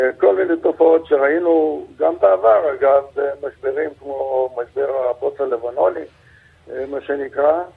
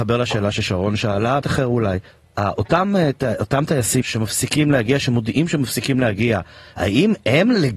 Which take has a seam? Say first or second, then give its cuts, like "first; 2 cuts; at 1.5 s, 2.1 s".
second; 3 cuts; at 1.4 s, 2.1 s, 4.0 s